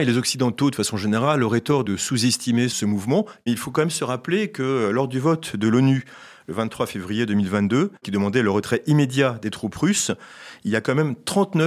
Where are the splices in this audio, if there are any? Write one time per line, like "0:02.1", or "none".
0:08.0